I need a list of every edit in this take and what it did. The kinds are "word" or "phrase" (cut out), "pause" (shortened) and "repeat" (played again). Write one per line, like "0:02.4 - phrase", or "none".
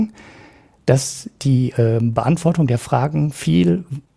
none